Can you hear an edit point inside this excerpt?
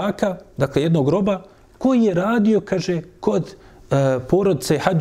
no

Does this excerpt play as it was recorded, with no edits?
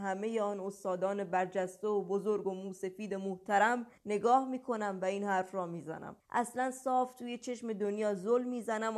no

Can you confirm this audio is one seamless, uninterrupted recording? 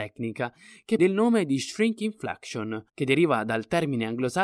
no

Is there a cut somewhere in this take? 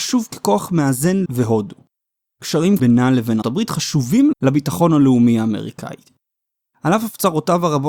yes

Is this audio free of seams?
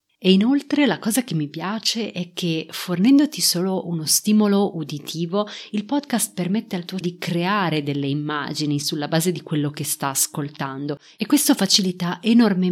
no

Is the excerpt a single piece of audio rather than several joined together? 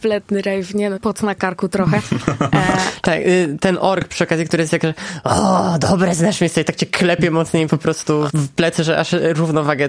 no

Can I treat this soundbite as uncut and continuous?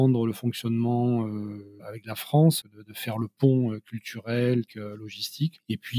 no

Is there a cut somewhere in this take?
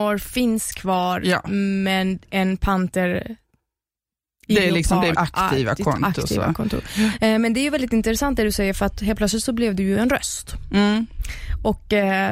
yes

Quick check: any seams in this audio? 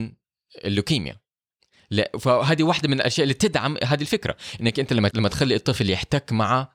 yes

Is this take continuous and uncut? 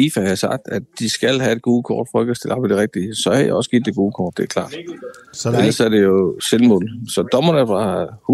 yes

